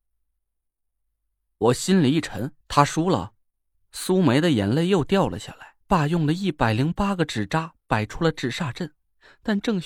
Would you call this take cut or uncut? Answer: cut